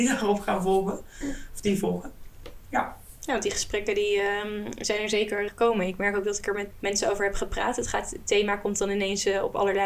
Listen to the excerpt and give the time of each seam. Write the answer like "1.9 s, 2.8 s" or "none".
5.5 s, 6.7 s

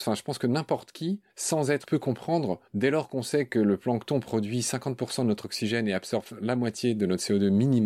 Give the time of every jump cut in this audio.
1.3 s, 1.8 s, 2.7 s

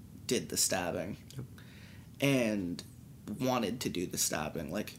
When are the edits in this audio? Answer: none

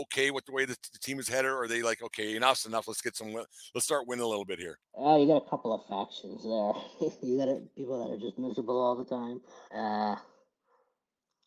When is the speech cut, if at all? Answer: 4.8 s, 9.7 s

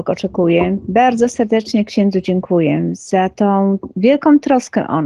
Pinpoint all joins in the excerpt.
none

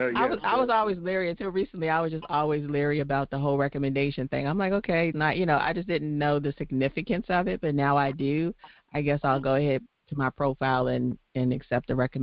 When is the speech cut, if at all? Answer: 5.1 s

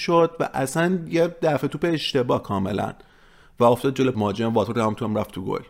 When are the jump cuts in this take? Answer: 4.1 s

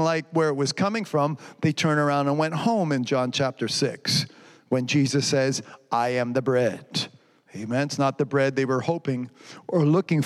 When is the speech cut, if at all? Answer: none

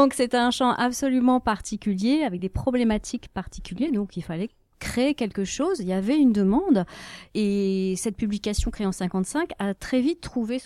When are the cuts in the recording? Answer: none

